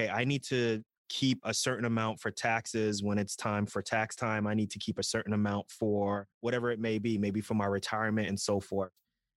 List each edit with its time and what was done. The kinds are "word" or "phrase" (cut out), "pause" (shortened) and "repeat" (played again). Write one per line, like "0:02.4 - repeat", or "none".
0:06.3 - pause